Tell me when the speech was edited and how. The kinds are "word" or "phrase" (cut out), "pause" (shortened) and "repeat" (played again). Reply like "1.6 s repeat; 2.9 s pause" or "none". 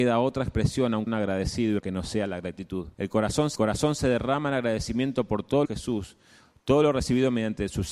1.1 s word; 1.8 s word; 2.9 s pause; 3.5 s repeat; 5.6 s phrase